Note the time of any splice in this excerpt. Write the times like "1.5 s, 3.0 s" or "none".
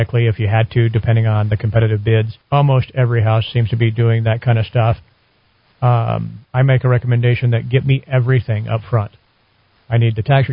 2.4 s, 6.4 s

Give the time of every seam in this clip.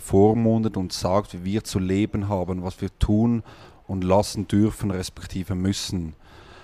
none

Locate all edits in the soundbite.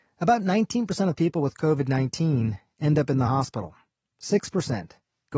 none

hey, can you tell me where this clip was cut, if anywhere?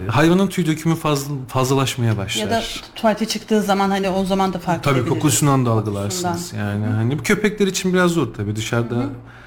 none

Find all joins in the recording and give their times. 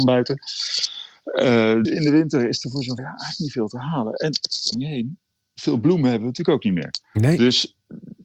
1.8 s, 3.0 s, 4.7 s

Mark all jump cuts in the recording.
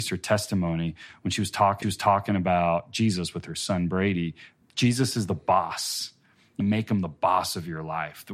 1.8 s, 4.6 s, 6.6 s

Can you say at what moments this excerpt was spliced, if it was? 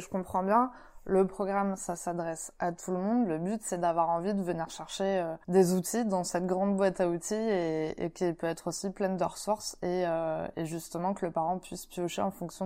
5.4 s

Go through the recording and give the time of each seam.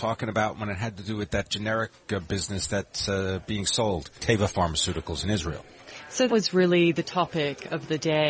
4.2 s, 6.3 s

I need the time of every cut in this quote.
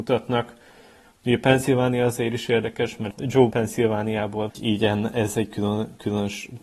3.5 s, 4.5 s

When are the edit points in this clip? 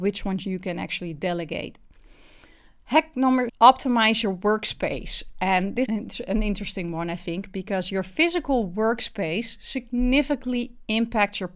3.5 s, 5.9 s

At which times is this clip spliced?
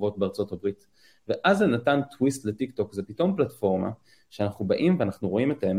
none

